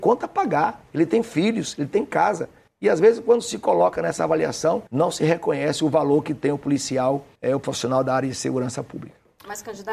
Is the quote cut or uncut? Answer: cut